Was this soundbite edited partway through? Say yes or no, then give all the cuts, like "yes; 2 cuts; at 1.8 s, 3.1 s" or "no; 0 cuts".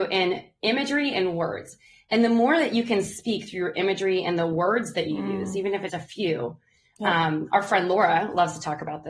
yes; 1 cut; at 5.9 s